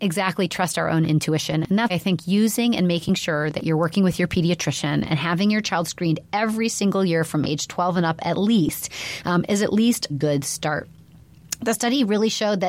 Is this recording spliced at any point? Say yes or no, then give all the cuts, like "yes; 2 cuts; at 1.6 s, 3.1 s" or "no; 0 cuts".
yes; 2 cuts; at 1.9 s, 10.1 s